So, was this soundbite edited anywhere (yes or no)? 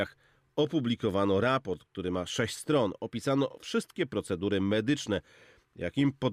no